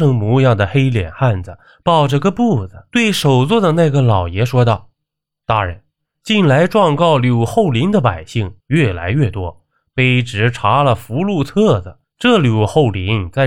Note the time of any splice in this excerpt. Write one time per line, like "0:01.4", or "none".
0:08.6

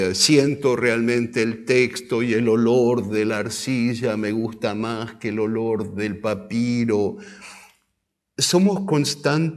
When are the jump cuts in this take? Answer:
none

